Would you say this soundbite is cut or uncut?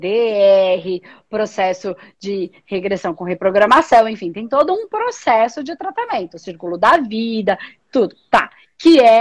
uncut